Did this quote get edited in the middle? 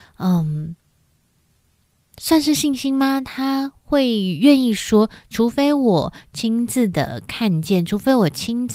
no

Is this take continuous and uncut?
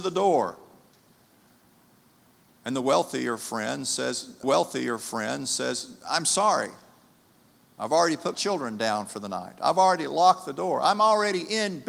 no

